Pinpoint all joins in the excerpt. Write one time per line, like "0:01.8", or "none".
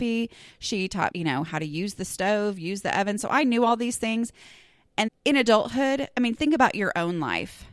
0:01.1
0:05.1